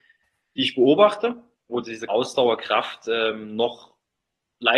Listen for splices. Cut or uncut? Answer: cut